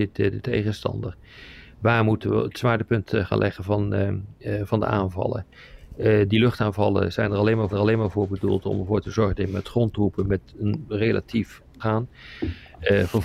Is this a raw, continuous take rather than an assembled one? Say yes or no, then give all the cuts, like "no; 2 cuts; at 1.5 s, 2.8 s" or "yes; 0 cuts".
no; 2 cuts; at 7.7 s, 11.8 s